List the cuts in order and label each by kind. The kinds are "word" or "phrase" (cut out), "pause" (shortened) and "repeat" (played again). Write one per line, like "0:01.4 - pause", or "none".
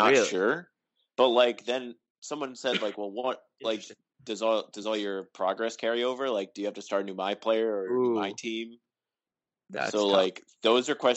none